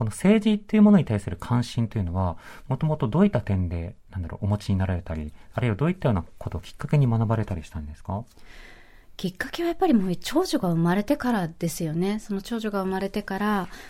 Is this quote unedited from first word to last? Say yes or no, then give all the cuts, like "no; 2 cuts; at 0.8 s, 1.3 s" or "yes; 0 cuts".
no; 1 cut; at 4.0 s